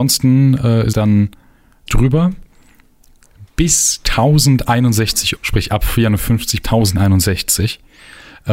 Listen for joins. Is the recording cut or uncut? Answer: cut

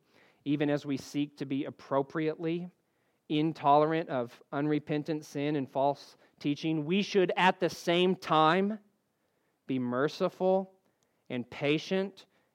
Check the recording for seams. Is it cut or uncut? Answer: uncut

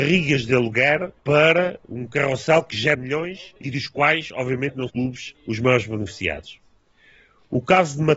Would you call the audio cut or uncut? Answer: cut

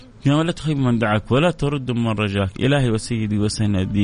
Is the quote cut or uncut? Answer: uncut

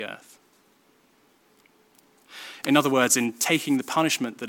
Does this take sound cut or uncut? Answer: uncut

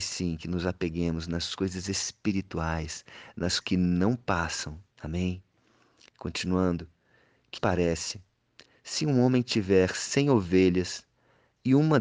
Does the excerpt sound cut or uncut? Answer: cut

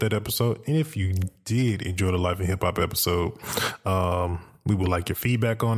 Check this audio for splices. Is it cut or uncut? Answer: uncut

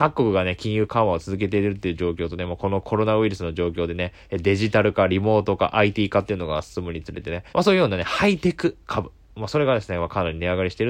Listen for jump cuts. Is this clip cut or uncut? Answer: cut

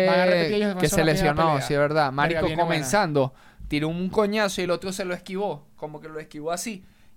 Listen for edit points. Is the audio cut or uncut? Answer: uncut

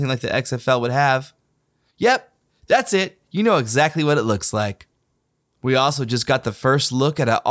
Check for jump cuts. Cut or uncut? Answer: uncut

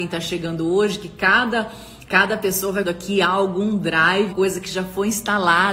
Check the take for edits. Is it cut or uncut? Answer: cut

